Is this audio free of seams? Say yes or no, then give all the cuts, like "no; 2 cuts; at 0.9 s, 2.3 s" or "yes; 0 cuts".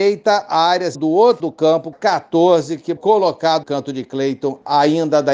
no; 5 cuts; at 0.9 s, 1.4 s, 1.9 s, 3.0 s, 3.6 s